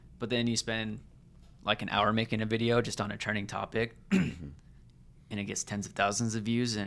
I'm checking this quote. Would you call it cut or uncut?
uncut